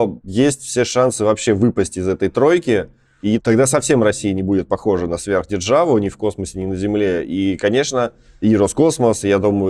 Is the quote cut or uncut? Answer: uncut